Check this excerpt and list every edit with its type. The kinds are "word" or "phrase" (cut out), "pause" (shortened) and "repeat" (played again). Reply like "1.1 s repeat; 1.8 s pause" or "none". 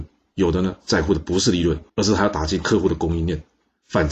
1.9 s pause